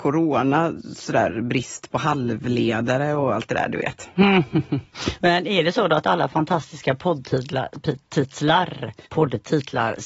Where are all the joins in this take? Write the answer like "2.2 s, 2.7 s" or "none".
9.1 s